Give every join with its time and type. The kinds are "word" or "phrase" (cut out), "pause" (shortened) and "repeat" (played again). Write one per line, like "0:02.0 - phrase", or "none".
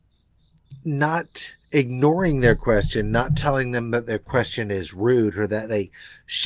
0:01.6 - pause